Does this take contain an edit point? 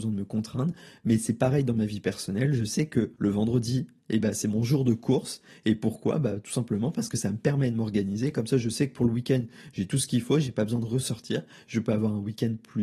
yes; 1 cut; at 3.2 s

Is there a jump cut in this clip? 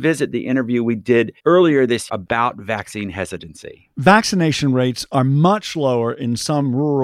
yes; 3 cuts; at 1.4 s, 2.1 s, 3.9 s

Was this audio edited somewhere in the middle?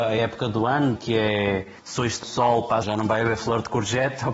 yes; 4 cuts; at 1.0 s, 1.8 s, 2.2 s, 2.8 s

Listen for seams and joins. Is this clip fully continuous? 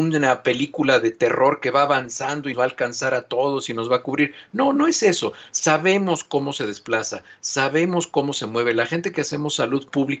no; 1 cut; at 2.5 s

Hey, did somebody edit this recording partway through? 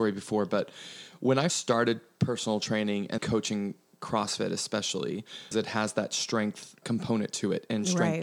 yes; 4 cuts; at 1.5 s, 3.2 s, 5.5 s, 6.8 s

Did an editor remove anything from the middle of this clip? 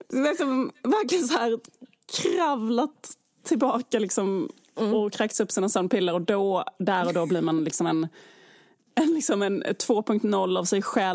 no; 0 cuts

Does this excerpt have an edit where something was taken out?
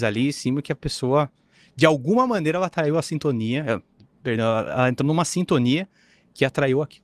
no; 0 cuts

